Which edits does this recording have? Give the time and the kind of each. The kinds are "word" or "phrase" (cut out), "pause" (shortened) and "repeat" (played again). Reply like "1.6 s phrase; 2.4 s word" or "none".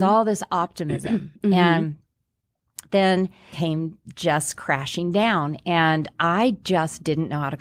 3.5 s word